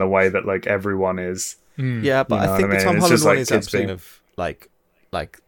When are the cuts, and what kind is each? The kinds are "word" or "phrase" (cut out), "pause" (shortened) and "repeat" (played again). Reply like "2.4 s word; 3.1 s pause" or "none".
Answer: 3.9 s phrase